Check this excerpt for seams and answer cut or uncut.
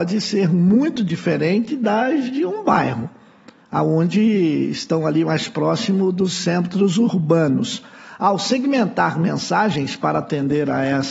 uncut